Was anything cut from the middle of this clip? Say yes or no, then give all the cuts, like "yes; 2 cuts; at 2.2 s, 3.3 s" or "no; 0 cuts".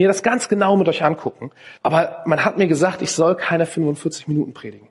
yes; 1 cut; at 1.8 s